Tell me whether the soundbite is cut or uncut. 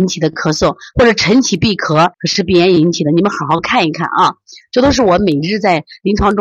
cut